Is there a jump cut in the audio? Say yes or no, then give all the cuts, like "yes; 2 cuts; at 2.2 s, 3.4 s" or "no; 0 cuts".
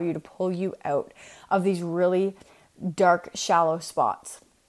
no; 0 cuts